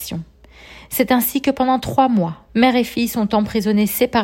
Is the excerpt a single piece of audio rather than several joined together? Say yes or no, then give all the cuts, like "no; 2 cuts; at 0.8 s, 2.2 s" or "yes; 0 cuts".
no; 1 cut; at 2.5 s